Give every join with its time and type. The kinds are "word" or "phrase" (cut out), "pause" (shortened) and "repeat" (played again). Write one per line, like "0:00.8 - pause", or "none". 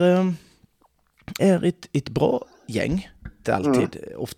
0:01.4 - word
0:03.4 - word

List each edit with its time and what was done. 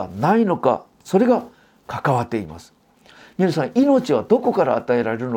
none

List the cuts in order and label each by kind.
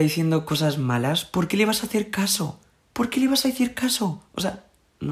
none

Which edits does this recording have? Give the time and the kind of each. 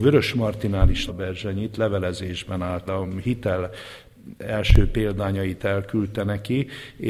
0:01.1 - phrase
0:02.9 - word

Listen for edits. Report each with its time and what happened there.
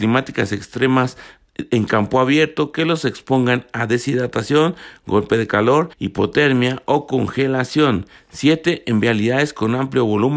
0:05.9 - pause

